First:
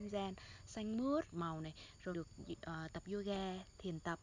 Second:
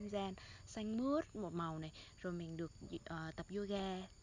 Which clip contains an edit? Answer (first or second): first